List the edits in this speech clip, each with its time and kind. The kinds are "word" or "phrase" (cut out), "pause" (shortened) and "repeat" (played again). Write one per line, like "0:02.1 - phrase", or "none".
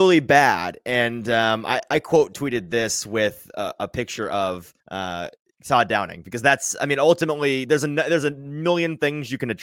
0:04.8 - pause